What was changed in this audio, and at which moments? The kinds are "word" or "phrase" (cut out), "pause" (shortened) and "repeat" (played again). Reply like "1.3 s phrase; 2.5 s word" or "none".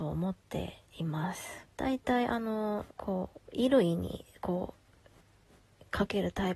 1.7 s pause; 2.9 s pause